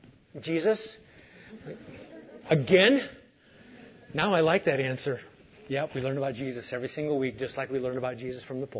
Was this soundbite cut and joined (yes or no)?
no